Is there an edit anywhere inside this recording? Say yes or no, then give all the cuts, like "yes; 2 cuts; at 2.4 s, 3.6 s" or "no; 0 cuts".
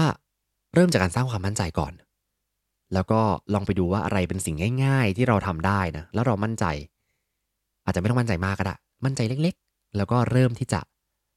no; 0 cuts